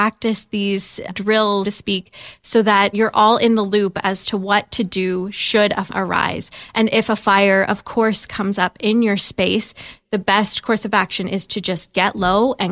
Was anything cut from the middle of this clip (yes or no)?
yes